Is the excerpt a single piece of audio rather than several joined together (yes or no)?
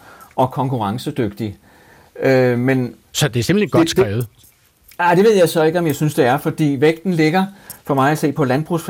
yes